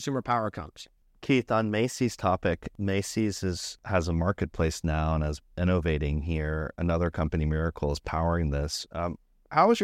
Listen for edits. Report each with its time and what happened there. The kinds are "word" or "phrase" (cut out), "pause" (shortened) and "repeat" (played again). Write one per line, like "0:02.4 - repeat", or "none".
none